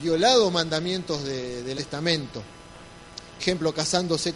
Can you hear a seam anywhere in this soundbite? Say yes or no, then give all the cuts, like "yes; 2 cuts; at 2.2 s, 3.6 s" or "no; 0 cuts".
yes; 2 cuts; at 1.8 s, 3.4 s